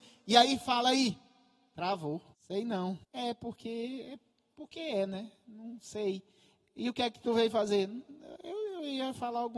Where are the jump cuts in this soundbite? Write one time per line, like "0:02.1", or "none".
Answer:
0:02.3
0:03.0
0:04.5